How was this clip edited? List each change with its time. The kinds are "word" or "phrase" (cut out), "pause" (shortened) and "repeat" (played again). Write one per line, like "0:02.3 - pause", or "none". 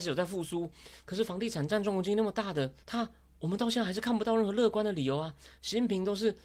0:02.8 - pause